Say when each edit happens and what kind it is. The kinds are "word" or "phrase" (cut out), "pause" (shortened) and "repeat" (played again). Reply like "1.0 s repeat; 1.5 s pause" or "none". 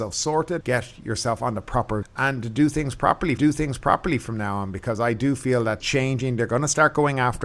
2.0 s word; 3.4 s repeat; 5.8 s phrase